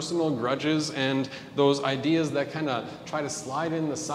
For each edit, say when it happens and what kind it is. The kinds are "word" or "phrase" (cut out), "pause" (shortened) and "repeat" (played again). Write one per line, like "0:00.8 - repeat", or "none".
none

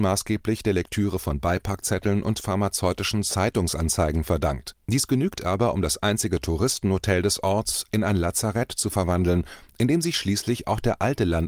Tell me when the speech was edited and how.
0:04.8 - pause

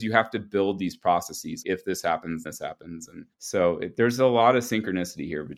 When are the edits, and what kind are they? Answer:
0:01.6 - word
0:02.4 - word
0:03.3 - pause

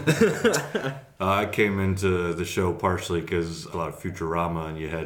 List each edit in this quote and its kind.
0:03.7 - word

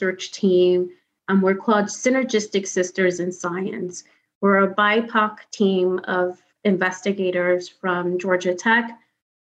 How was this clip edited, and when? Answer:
none

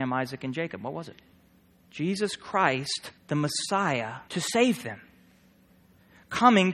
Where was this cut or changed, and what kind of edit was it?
0:01.7 - pause
0:03.2 - pause
0:04.3 - word

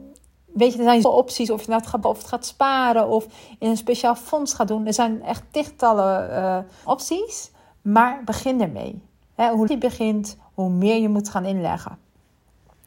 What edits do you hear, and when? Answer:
0:01.0 - word
0:02.0 - word
0:06.8 - word
0:09.7 - word

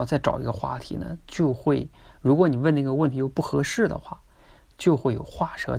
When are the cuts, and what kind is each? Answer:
none

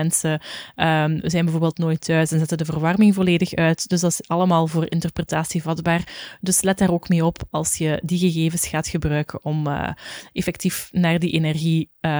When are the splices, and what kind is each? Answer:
none

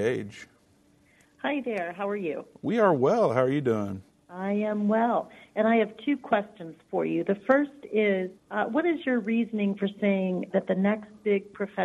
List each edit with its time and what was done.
0:04.1 - pause
0:08.4 - pause
0:10.5 - word

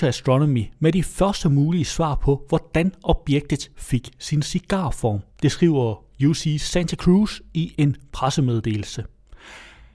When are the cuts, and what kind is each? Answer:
0:05.3 - pause

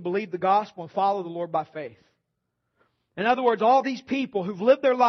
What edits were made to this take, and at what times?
none

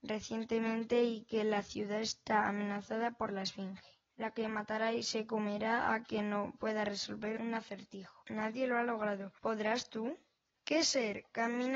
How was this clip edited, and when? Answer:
0:04.1 - pause
0:08.2 - pause
0:09.4 - pause
0:10.4 - pause

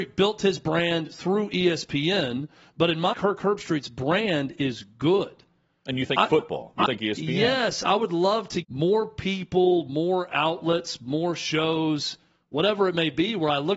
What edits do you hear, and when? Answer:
0:03.1 - word
0:06.9 - word
0:08.6 - word

